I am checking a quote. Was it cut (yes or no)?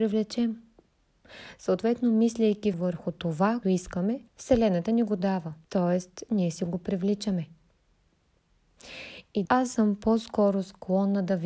yes